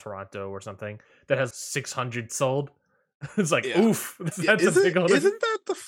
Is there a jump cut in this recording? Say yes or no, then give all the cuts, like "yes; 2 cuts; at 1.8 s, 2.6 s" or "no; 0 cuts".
yes; 3 cuts; at 1.5 s, 2.3 s, 4.3 s